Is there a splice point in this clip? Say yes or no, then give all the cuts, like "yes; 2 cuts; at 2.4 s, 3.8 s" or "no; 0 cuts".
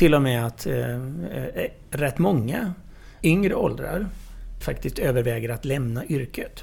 yes; 2 cuts; at 3.2 s, 4.6 s